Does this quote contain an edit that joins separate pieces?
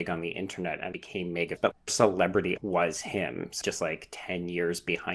yes; 5 cuts; at 0.9 s, 1.6 s, 1.9 s, 2.6 s, 3.6 s

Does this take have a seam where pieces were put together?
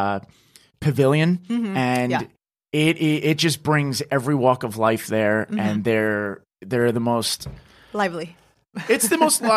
no; 0 cuts

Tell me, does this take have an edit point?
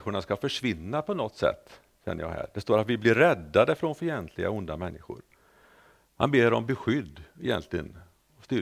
no; 0 cuts

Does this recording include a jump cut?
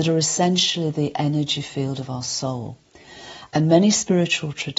no; 0 cuts

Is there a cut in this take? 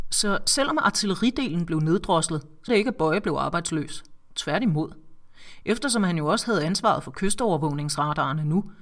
yes; 1 cut; at 2.7 s

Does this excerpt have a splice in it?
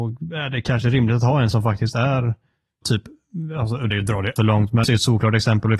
yes; 5 cuts; at 1.5 s, 2.8 s, 3.9 s, 4.4 s, 4.8 s

